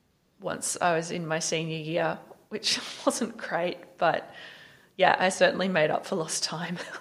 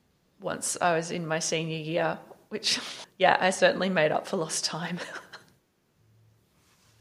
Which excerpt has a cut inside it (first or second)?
second